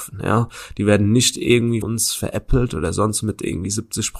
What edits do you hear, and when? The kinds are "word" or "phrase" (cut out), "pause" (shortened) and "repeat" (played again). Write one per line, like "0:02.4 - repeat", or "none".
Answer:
0:01.8 - word
0:03.2 - word